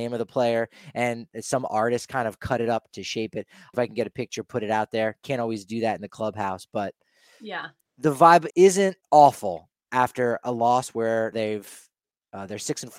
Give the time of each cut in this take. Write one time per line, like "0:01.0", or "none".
0:02.9
0:03.7
0:07.9
0:08.5
0:09.0
0:11.3

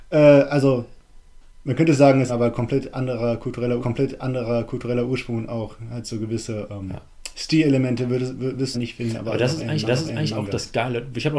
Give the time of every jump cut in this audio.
0:02.3
0:03.8
0:08.7
0:09.9

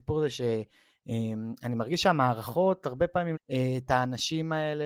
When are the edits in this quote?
0:03.3

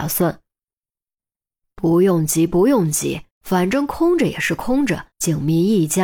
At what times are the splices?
0:03.3
0:05.1

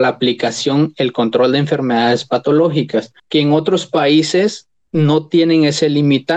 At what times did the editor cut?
0:03.2

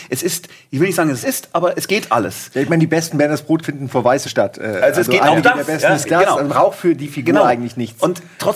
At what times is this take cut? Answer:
0:01.2
0:03.6
0:04.2
0:06.0
0:06.5

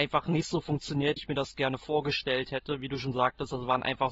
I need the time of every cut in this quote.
0:01.2

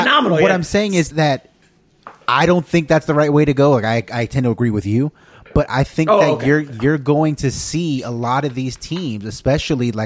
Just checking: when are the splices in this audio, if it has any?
0:01.1

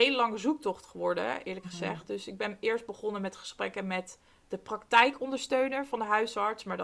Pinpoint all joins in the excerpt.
none

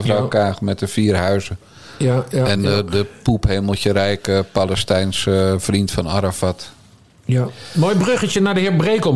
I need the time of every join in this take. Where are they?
none

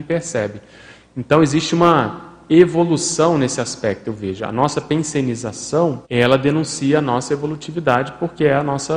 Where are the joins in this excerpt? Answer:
0:06.0

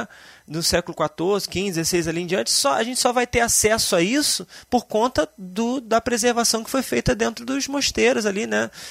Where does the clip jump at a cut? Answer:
none

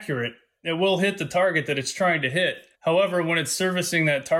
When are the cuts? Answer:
0:02.7

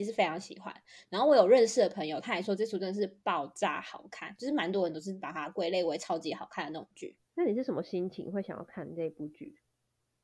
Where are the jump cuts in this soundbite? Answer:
0:07.3

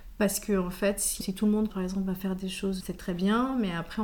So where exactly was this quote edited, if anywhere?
0:01.2
0:01.7
0:02.8

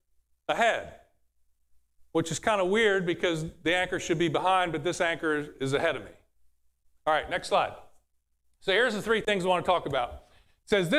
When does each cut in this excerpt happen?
none

